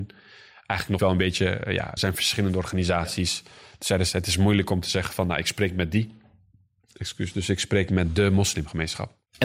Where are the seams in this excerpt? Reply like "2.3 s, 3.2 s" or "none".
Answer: 1.0 s, 2.0 s